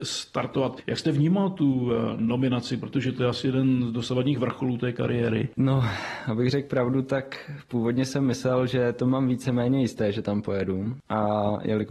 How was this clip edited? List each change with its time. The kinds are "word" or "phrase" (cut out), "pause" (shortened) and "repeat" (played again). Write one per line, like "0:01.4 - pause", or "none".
none